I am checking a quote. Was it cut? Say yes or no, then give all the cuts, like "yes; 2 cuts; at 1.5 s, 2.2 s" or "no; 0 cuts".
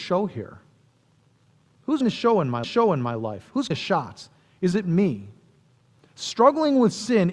yes; 5 cuts; at 2.0 s, 2.6 s, 3.7 s, 4.7 s, 5.9 s